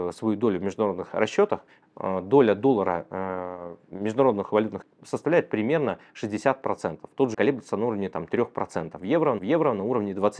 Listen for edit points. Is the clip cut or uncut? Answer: cut